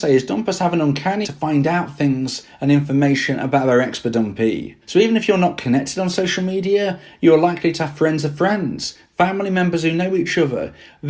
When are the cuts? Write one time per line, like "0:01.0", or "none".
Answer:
0:01.2
0:04.8